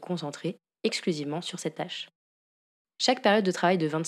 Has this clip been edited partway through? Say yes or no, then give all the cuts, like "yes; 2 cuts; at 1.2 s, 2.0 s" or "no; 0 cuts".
no; 0 cuts